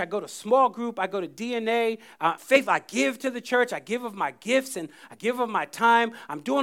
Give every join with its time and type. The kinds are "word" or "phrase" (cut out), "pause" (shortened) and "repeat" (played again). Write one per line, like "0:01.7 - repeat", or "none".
0:02.4 - word